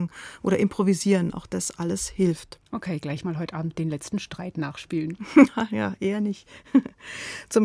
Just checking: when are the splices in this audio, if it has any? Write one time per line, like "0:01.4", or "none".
0:02.7